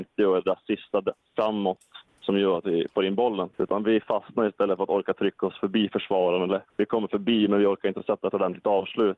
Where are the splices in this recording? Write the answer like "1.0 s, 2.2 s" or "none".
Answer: 2.1 s, 3.5 s, 6.7 s

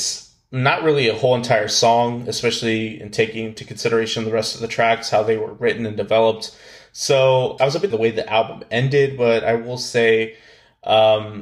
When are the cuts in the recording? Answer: 7.6 s, 7.9 s

